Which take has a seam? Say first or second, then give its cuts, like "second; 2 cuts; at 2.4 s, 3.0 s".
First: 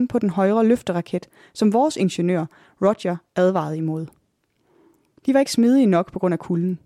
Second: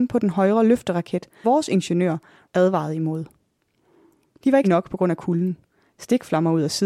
second; 3 cuts; at 1.4 s, 2.5 s, 4.6 s